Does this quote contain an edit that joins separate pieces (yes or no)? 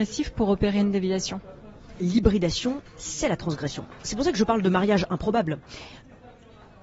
no